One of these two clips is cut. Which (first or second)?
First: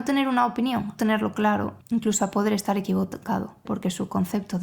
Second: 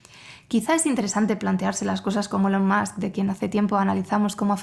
first